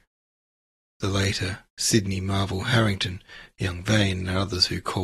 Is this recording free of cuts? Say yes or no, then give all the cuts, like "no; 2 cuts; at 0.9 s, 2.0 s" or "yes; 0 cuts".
no; 1 cut; at 1.7 s